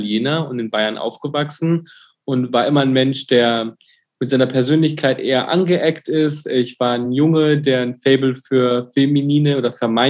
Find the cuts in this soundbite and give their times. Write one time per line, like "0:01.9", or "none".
none